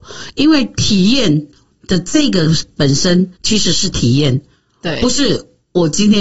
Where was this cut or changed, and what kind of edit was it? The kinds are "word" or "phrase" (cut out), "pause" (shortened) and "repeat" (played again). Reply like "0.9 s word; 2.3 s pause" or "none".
3.3 s pause